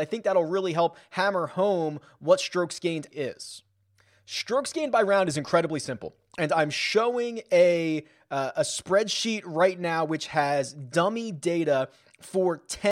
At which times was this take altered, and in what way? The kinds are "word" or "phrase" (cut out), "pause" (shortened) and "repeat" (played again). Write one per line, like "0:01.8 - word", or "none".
0:03.1 - word